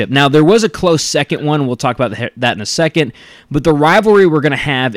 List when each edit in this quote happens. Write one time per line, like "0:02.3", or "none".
none